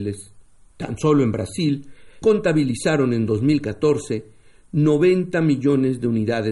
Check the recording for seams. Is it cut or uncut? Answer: cut